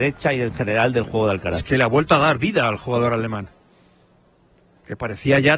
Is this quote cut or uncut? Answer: uncut